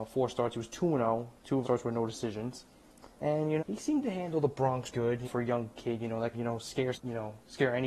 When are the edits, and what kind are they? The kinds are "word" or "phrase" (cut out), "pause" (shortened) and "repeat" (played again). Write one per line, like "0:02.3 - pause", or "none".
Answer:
0:01.6 - word
0:03.6 - word
0:04.9 - word
0:05.2 - word
0:06.3 - word
0:06.9 - word